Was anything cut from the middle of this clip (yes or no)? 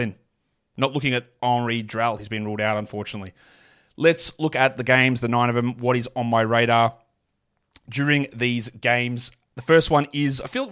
no